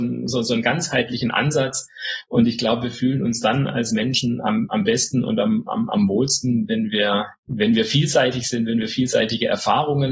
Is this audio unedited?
no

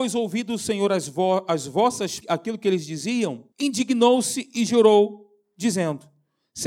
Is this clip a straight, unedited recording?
no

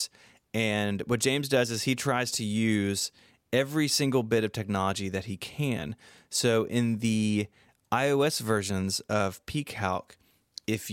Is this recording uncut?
yes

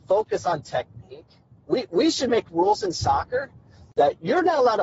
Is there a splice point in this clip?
no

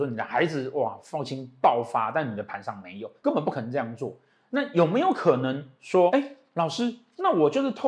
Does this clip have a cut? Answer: no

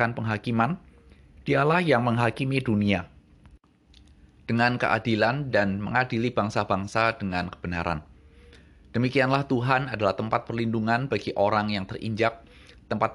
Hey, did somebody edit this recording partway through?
no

